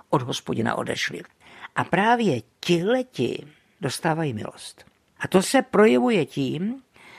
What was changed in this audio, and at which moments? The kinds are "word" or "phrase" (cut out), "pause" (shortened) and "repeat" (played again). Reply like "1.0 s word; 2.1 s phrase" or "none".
none